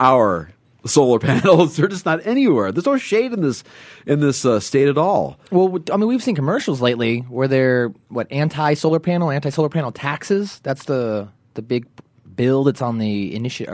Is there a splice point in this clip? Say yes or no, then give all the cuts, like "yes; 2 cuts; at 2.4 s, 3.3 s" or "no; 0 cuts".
no; 0 cuts